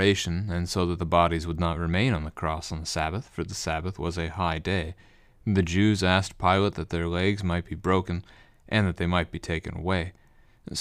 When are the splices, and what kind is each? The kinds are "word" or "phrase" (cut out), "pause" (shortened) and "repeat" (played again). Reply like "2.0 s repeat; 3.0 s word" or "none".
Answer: none